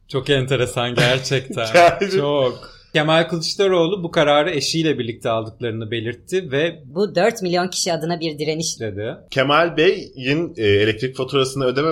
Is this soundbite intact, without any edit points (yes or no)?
yes